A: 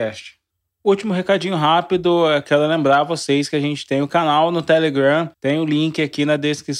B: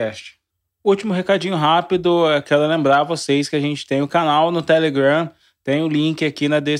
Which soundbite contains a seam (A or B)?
A